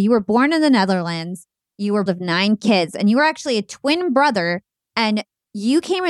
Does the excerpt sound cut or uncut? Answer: cut